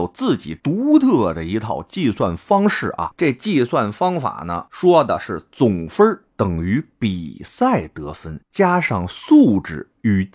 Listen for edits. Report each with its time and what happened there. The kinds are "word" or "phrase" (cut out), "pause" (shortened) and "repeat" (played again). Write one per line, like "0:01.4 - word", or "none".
0:04.7 - word